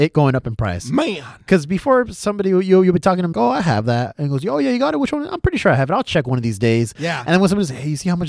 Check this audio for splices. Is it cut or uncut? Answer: cut